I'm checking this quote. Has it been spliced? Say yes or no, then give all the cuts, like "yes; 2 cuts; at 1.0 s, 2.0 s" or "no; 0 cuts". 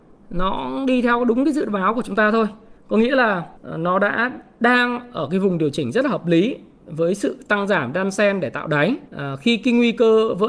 yes; 3 cuts; at 2.8 s, 3.6 s, 9.1 s